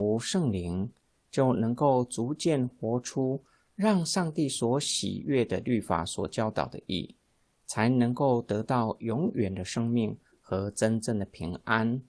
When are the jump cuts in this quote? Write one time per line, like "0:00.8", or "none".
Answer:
none